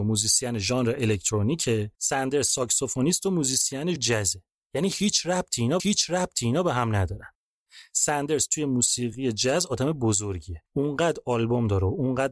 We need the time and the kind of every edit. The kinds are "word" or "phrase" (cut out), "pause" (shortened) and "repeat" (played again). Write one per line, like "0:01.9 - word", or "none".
0:01.9 - pause
0:04.0 - word
0:05.8 - repeat
0:10.7 - pause